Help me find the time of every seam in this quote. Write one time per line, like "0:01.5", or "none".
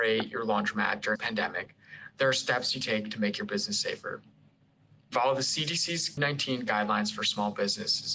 0:01.1
0:02.8
0:05.1
0:06.2